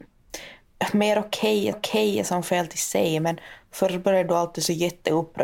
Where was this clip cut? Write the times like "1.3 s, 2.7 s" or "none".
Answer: 1.7 s